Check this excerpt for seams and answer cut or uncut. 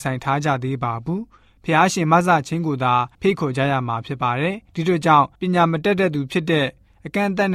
cut